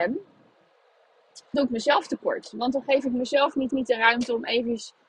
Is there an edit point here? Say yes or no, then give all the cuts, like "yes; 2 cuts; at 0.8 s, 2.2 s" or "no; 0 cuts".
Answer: yes; 2 cuts; at 1.5 s, 3.7 s